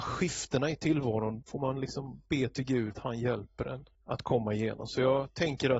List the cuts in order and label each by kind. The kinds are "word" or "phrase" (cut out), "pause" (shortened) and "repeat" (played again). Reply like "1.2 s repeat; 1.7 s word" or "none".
1.4 s word; 2.2 s pause; 2.9 s word; 3.9 s pause